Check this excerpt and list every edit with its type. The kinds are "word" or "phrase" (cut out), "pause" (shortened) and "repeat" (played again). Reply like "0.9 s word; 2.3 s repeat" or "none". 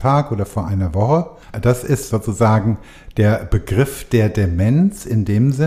none